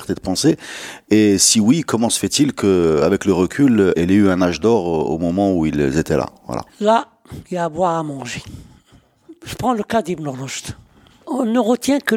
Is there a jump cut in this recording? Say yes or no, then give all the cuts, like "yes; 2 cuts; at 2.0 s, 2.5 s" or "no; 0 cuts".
yes; 2 cuts; at 3.9 s, 6.7 s